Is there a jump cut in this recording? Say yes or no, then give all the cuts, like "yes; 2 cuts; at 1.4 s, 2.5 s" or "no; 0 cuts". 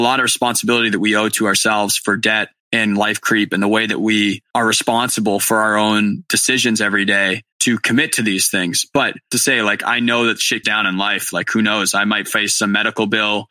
yes; 3 cuts; at 7.5 s, 9.3 s, 10.6 s